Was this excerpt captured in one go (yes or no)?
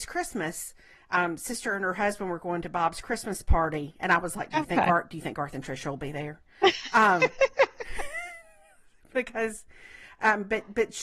yes